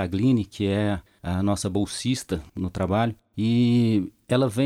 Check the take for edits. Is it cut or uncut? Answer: cut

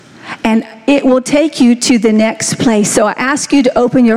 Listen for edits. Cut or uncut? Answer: uncut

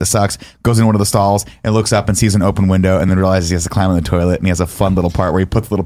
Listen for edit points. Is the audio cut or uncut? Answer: uncut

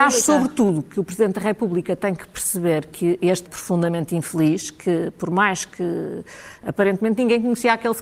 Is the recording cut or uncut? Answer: cut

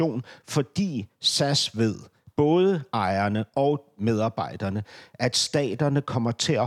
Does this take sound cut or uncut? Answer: uncut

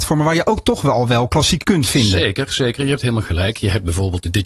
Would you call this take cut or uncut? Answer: cut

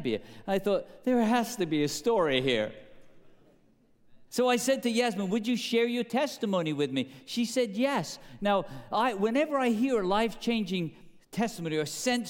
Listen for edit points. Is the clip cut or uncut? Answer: cut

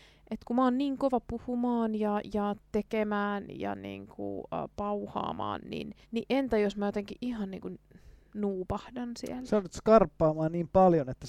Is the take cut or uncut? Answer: cut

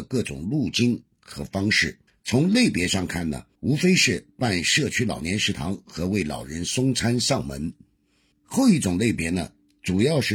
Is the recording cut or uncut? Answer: cut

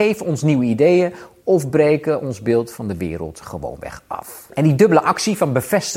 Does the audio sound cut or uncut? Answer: uncut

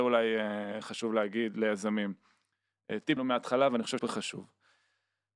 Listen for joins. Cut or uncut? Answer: cut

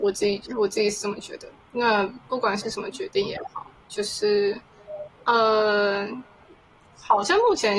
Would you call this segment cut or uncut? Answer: cut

